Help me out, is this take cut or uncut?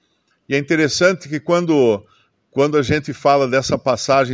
uncut